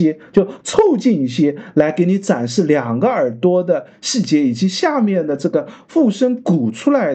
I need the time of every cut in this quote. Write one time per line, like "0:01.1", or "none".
none